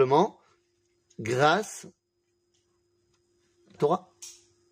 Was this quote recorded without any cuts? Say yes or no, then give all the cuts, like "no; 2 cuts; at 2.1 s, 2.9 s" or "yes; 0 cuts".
no; 1 cut; at 3.8 s